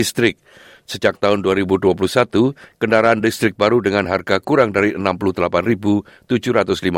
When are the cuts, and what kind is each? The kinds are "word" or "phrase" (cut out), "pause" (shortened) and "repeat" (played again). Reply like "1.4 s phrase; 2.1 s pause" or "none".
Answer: none

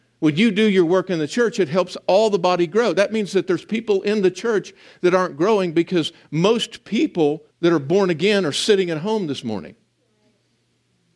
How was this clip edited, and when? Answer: 7.5 s pause

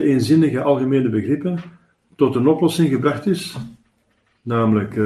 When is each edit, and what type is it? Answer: none

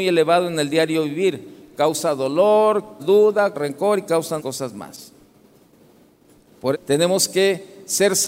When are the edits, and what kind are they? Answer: 3.0 s word; 3.5 s word; 4.4 s word; 6.7 s word

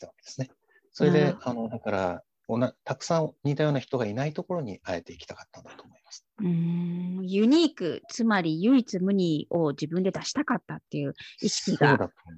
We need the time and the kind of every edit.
6.3 s pause

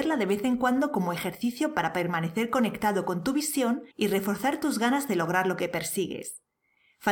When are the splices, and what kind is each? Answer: 3.9 s pause

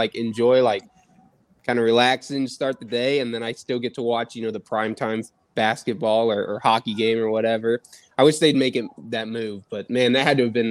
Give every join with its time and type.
none

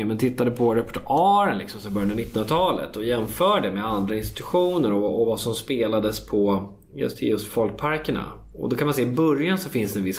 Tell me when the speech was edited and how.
none

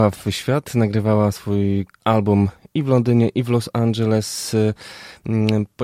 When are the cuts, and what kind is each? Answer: 1.9 s pause

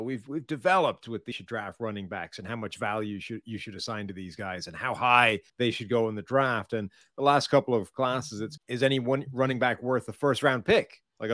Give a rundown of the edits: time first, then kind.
1.3 s phrase; 5.5 s pause; 8.6 s word

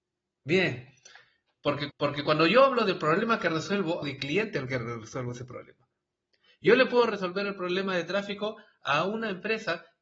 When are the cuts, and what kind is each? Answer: 1.9 s repeat; 4.0 s phrase

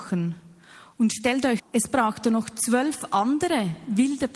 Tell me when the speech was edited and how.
1.6 s word

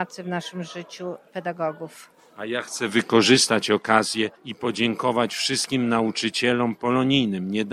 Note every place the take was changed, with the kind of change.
4.4 s pause

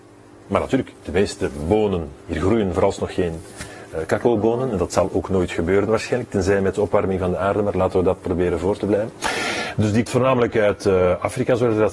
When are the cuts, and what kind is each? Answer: 1.0 s pause; 2.2 s pause; 10.1 s word

